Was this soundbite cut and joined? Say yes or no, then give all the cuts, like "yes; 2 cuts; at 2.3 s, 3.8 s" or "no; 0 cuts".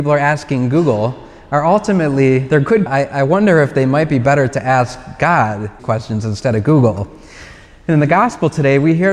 yes; 2 cuts; at 2.9 s, 5.8 s